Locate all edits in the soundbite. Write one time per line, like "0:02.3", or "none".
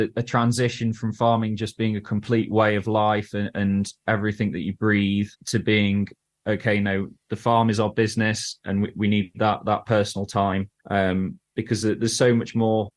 0:05.3
0:10.8